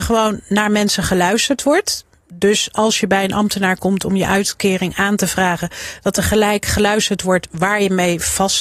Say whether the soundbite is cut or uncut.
uncut